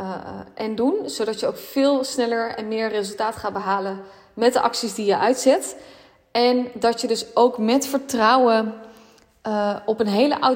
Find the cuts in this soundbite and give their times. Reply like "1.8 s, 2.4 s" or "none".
none

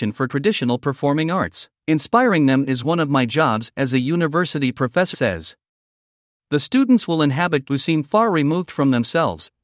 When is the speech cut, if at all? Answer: 1.7 s, 5.1 s, 7.7 s

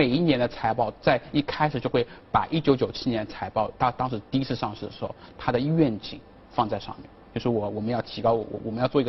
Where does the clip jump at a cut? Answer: 3.7 s

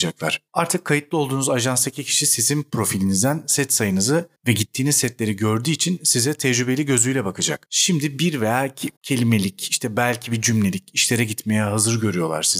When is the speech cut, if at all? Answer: 9.0 s

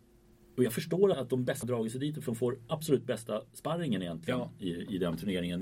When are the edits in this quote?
1.1 s, 1.6 s, 2.7 s

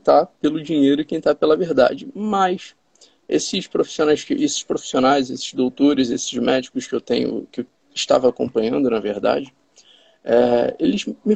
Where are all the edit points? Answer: none

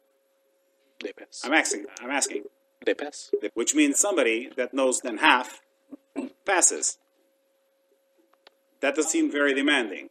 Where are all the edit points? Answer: 3.5 s, 3.9 s, 5.0 s, 9.0 s

